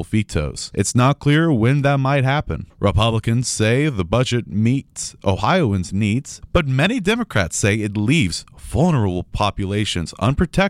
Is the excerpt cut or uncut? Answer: uncut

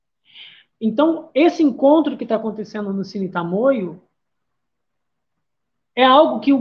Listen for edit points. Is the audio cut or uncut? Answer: uncut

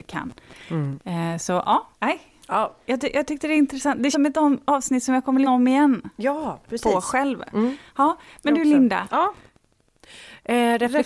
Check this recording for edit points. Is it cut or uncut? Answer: cut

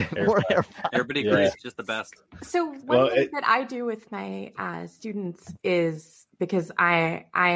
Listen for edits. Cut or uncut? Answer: uncut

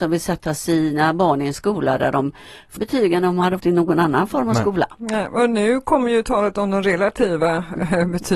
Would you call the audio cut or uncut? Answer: cut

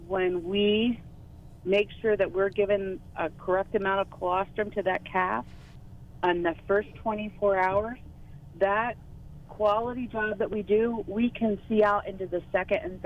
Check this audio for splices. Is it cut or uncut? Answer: uncut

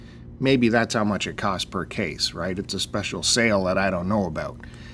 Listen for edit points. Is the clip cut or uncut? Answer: uncut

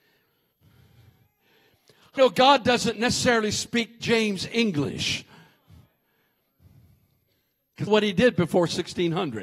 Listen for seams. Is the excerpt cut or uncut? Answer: cut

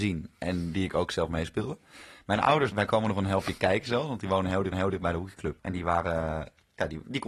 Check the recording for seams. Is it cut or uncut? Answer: cut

